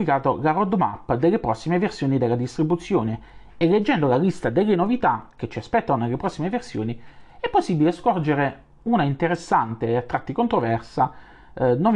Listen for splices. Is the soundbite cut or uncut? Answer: uncut